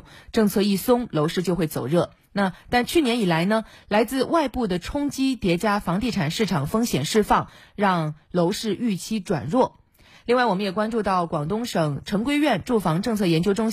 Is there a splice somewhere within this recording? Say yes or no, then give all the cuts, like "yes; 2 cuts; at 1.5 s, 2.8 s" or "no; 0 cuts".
no; 0 cuts